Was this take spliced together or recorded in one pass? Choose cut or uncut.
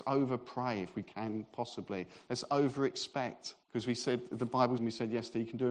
cut